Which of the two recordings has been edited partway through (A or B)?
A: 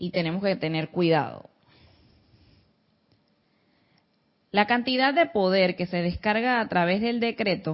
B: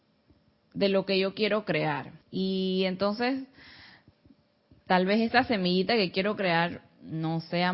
B